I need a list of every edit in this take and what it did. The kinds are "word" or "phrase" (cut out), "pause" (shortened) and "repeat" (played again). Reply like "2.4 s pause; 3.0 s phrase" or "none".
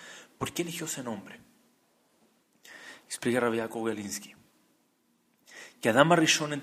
none